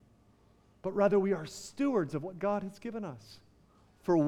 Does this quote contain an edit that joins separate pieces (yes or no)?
no